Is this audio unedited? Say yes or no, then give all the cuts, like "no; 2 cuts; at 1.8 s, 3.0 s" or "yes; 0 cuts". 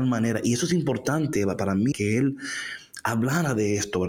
no; 2 cuts; at 1.6 s, 1.9 s